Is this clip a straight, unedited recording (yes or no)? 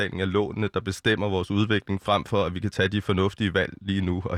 yes